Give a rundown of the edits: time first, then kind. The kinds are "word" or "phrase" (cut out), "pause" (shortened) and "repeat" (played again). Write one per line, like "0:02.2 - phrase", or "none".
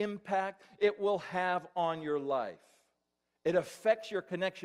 none